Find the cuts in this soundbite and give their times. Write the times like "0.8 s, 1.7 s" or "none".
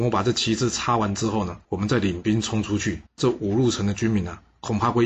1.6 s, 3.1 s